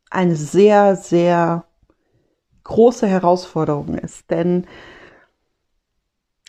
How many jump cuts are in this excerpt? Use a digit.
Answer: 0